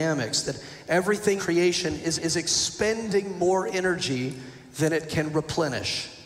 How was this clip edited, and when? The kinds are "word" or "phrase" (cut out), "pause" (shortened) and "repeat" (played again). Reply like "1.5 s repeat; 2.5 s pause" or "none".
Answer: 1.4 s word; 2.2 s repeat